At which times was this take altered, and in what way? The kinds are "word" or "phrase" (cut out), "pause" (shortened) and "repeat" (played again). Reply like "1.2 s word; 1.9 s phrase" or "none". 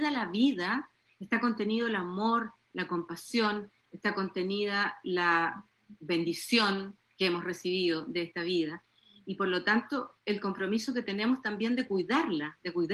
10.2 s pause